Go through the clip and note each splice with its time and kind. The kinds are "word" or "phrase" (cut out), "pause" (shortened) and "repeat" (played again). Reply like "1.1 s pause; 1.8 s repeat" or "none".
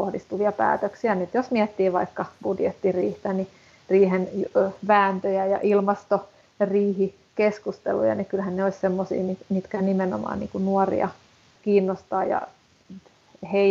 none